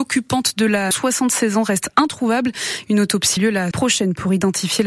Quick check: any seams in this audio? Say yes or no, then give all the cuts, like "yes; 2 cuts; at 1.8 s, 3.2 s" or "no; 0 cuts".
yes; 3 cuts; at 0.9 s, 3.4 s, 3.7 s